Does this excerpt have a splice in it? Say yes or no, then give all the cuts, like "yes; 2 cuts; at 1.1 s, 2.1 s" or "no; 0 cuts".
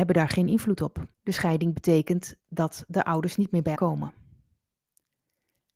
yes; 3 cuts; at 1.1 s, 2.4 s, 3.7 s